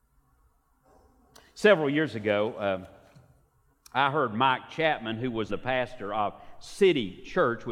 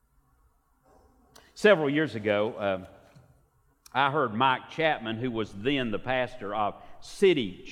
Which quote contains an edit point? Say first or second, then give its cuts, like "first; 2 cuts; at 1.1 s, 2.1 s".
first; 1 cut; at 5.5 s